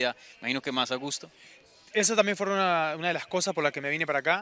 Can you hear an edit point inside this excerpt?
no; 0 cuts

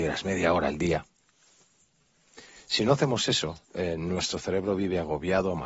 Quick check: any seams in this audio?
yes; 1 cut; at 3.6 s

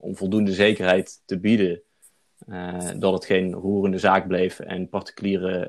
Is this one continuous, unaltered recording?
yes; 0 cuts

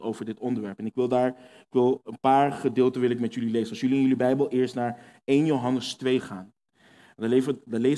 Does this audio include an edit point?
no; 0 cuts

